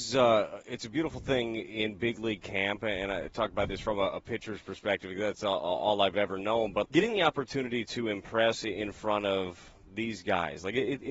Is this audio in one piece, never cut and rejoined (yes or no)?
no